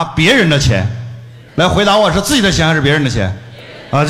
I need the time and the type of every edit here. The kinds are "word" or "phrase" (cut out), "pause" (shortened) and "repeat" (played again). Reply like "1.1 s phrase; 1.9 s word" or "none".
1.5 s pause